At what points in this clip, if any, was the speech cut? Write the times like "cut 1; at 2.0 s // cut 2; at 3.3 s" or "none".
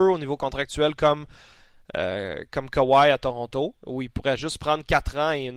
none